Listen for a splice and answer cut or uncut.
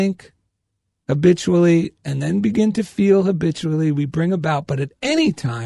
uncut